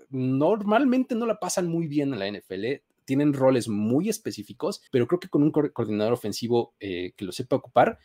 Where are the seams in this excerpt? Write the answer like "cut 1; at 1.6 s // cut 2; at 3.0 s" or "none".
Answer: cut 1; at 4.9 s